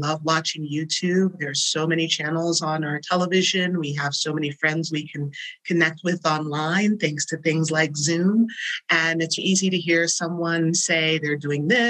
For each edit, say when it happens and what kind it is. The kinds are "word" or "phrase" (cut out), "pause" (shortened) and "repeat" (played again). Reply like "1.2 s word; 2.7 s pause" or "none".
9.4 s word